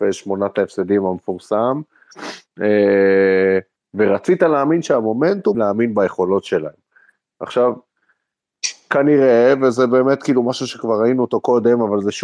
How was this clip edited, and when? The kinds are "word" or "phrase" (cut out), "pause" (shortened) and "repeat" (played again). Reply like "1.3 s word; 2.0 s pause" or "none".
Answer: 3.8 s pause; 5.5 s phrase